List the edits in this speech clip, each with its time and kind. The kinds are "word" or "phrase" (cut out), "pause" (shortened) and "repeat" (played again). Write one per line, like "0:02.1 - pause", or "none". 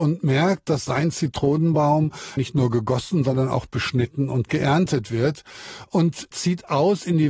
0:02.4 - phrase
0:06.3 - word